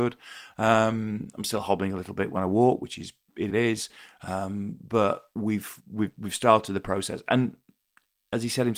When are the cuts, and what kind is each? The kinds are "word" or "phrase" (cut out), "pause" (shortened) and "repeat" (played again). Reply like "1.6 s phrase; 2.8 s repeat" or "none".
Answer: 3.5 s phrase; 5.8 s word